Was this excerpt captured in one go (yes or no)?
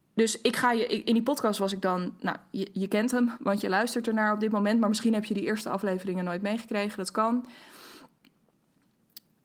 yes